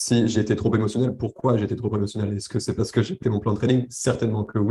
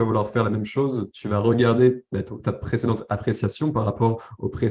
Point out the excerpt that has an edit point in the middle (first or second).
first